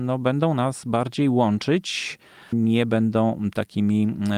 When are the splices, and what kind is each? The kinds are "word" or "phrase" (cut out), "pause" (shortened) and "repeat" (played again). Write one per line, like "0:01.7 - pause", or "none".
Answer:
0:02.5 - word